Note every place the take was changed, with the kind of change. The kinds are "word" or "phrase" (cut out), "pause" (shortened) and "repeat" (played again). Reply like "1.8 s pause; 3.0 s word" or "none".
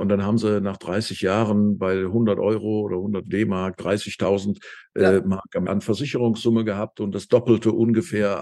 5.7 s word